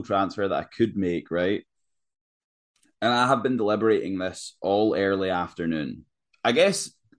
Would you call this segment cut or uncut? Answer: uncut